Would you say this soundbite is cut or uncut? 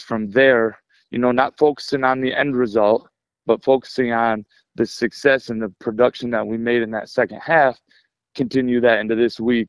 uncut